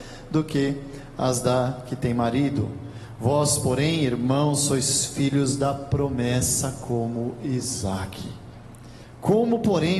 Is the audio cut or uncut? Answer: uncut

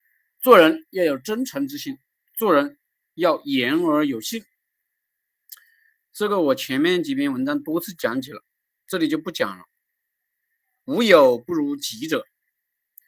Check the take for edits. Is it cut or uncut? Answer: uncut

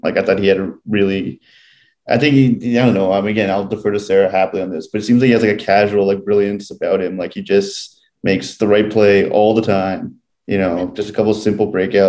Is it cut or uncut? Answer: uncut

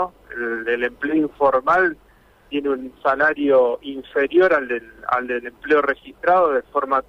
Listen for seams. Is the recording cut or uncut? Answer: uncut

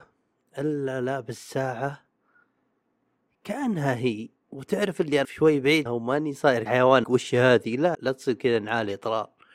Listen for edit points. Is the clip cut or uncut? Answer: cut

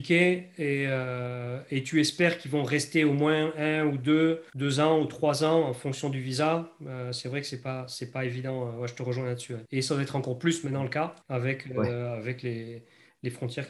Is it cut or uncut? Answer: cut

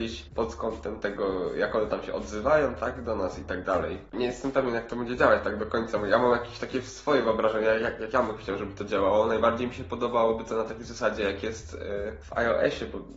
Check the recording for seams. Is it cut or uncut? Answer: uncut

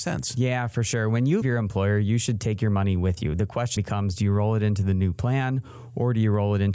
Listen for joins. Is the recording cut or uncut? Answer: cut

